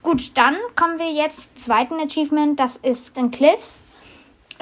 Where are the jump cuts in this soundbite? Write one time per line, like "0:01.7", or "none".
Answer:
0:01.6
0:03.1